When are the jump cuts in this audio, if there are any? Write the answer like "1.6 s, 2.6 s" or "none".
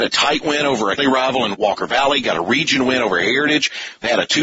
1.0 s, 1.5 s